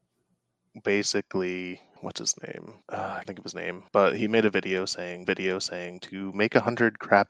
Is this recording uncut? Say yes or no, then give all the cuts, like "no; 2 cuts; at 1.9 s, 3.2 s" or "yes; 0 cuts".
no; 5 cuts; at 2.0 s, 2.8 s, 3.2 s, 3.9 s, 5.2 s